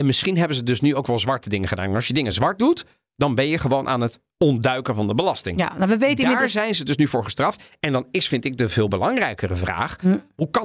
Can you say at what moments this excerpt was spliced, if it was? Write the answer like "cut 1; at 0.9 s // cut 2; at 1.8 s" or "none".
none